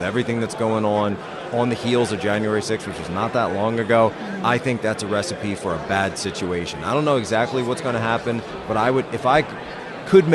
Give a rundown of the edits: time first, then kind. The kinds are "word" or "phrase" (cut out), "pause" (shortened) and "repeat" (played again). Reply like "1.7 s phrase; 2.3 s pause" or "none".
none